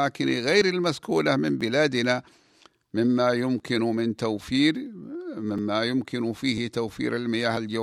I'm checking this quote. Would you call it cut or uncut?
uncut